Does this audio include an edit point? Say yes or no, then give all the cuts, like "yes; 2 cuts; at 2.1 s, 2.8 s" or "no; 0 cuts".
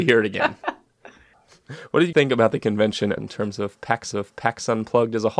yes; 3 cuts; at 2.1 s, 3.2 s, 4.1 s